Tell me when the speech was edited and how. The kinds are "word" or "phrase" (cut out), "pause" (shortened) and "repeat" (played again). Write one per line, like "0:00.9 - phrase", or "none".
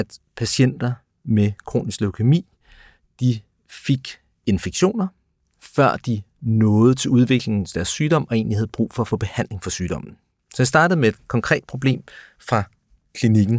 none